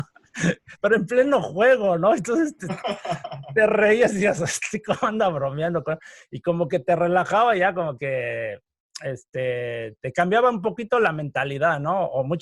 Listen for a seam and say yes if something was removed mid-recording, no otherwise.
no